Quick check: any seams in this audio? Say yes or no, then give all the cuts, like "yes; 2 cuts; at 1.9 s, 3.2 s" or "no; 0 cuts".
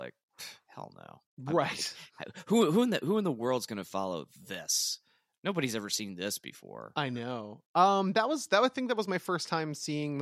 no; 0 cuts